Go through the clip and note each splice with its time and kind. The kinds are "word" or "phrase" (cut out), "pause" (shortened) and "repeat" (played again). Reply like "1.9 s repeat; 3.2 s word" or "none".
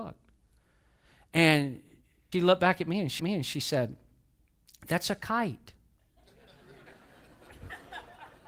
2.3 s word; 3.2 s repeat